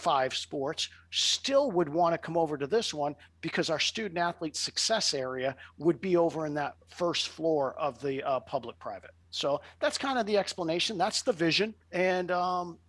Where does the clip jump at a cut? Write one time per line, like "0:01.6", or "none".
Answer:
0:06.8
0:09.2
0:11.8